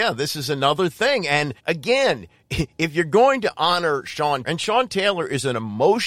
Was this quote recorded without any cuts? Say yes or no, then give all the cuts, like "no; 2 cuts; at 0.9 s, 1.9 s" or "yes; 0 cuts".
no; 2 cuts; at 1.6 s, 4.4 s